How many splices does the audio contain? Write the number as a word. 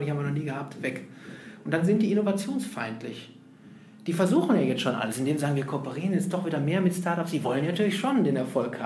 zero